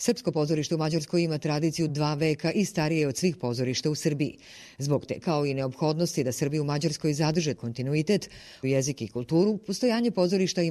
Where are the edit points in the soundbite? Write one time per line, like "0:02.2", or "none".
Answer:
0:01.9
0:05.2
0:07.6
0:08.6